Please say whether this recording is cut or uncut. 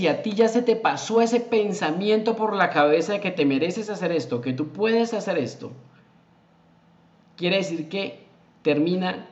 uncut